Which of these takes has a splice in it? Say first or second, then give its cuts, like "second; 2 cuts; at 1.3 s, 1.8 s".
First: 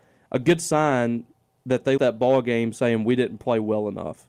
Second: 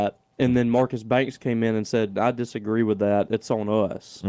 first; 1 cut; at 2.0 s